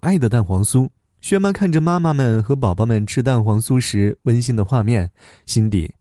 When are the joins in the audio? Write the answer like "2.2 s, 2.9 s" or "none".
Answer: 1.0 s